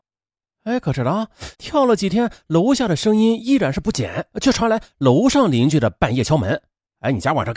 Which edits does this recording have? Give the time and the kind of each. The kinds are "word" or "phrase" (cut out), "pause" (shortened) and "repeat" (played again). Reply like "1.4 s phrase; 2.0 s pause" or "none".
1.5 s pause; 4.3 s pause

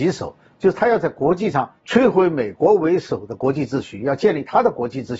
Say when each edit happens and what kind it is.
1.8 s pause

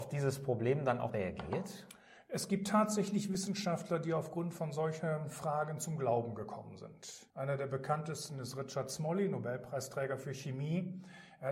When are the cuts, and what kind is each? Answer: 1.1 s word; 7.3 s pause

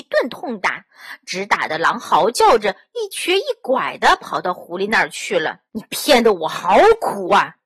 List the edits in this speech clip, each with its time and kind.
5.7 s pause

